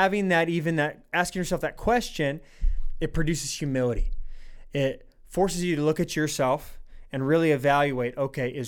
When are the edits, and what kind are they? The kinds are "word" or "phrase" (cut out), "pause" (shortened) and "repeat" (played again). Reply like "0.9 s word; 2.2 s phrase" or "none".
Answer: none